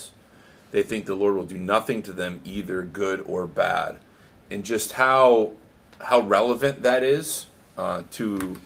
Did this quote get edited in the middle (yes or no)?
no